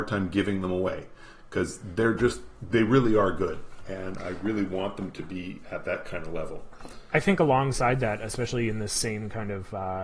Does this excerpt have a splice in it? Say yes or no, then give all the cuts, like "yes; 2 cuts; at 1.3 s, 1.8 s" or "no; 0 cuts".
no; 0 cuts